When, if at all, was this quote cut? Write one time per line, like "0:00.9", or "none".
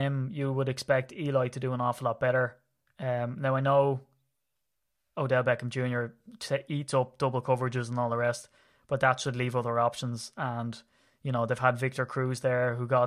none